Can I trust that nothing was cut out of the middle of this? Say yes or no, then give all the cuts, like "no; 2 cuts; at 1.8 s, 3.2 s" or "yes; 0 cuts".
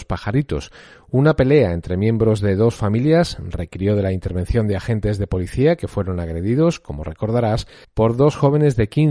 no; 1 cut; at 7.8 s